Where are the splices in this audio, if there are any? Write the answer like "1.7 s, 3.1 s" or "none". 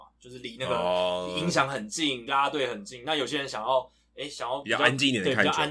2.3 s